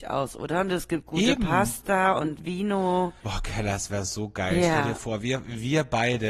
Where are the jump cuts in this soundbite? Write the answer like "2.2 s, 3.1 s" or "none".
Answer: 3.2 s